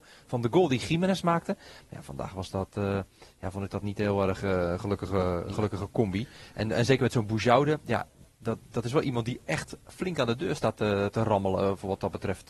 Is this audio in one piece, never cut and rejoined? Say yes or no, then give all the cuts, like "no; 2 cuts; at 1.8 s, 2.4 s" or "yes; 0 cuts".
yes; 0 cuts